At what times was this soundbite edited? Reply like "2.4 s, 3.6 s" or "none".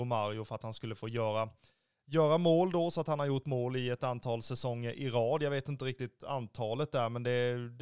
none